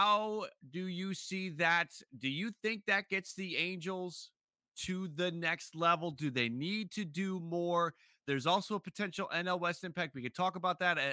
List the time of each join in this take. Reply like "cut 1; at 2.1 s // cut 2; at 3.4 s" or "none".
none